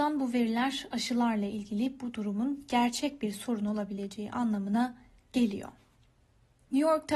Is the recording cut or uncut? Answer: uncut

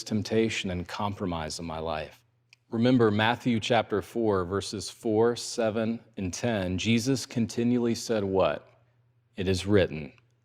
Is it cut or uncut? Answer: uncut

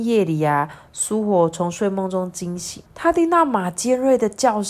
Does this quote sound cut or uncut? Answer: cut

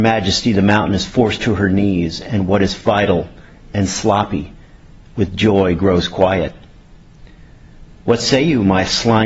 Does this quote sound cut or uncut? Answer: uncut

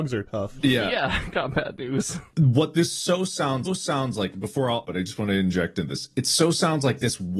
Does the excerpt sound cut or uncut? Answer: cut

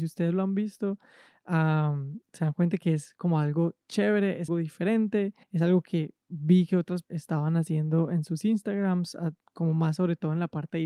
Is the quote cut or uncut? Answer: cut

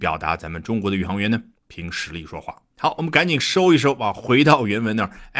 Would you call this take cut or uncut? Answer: cut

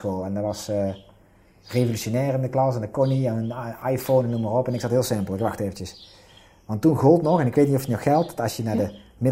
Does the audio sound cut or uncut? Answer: uncut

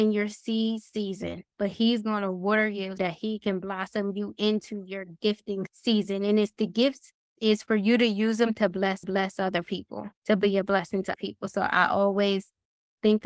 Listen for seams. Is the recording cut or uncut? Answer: cut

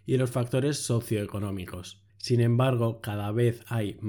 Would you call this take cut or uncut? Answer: cut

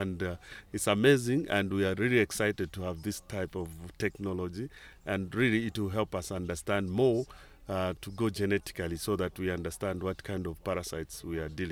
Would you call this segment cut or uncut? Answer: uncut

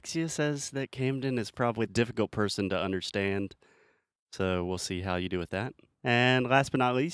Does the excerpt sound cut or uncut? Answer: cut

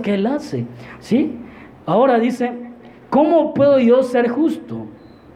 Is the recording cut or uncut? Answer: uncut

